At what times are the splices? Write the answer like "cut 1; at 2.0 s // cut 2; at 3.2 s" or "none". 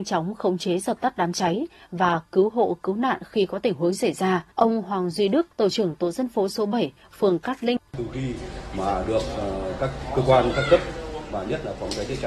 cut 1; at 4.5 s // cut 2; at 5.5 s // cut 3; at 7.9 s